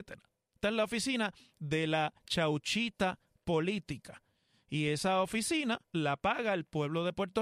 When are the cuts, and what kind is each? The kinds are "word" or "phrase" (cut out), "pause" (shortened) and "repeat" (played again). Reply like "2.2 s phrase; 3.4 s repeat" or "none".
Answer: none